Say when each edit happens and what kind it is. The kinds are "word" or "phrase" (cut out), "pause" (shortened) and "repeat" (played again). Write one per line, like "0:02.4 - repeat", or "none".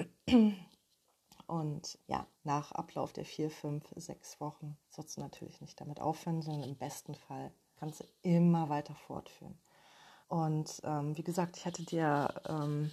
0:02.0 - word
0:02.3 - pause
0:04.8 - pause
0:07.8 - word
0:10.2 - pause